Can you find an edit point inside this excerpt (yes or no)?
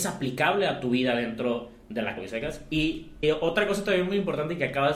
yes